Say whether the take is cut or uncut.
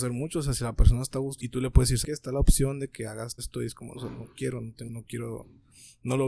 cut